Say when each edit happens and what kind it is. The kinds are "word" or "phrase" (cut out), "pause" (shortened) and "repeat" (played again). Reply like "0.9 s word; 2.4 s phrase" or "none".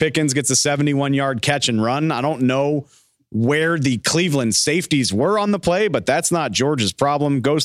none